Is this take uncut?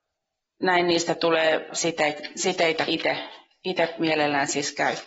no; 2 cuts; at 1.7 s, 2.9 s

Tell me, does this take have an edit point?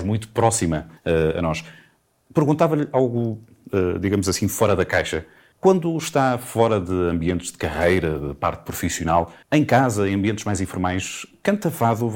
yes; 2 cuts; at 1.0 s, 9.4 s

